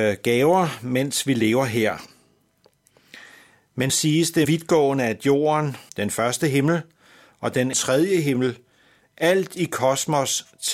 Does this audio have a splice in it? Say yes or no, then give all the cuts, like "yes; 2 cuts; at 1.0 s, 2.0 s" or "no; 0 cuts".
yes; 4 cuts; at 3.9 s, 4.4 s, 5.9 s, 7.7 s